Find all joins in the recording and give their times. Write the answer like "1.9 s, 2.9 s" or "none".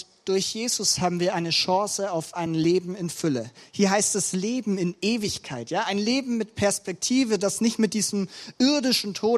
none

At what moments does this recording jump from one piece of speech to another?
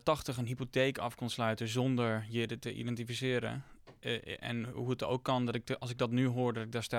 none

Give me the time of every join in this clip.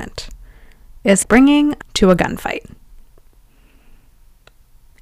1.2 s, 1.8 s

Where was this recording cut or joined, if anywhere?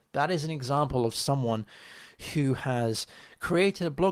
none

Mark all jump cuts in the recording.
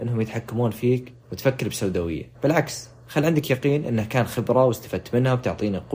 1.2 s, 2.3 s

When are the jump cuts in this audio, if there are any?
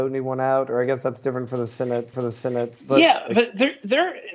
2.1 s

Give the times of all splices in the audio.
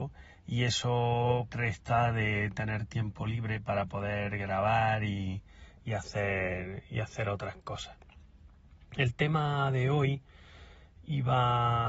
1.5 s

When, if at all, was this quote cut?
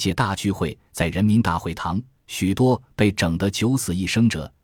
none

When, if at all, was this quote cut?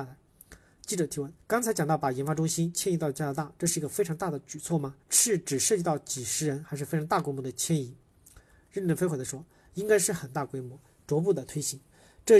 1.4 s, 5.0 s

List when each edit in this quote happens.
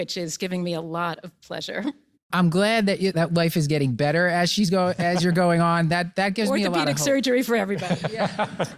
3.1 s

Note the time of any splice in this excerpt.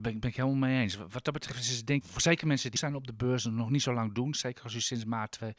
2.0 s, 2.8 s

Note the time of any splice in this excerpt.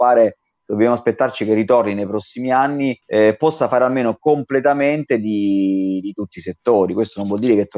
3.0 s

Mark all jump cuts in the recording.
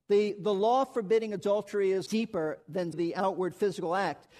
2.1 s, 2.9 s

